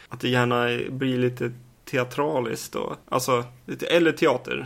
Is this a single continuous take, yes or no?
no